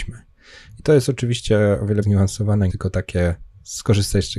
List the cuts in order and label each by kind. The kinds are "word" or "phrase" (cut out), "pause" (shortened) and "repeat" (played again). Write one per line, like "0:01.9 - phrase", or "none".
0:02.0 - word
0:02.7 - word